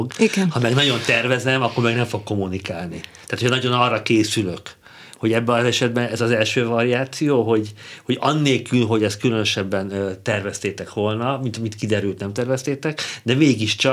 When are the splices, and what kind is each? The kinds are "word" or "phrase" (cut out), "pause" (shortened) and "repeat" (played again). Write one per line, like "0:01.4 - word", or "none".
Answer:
none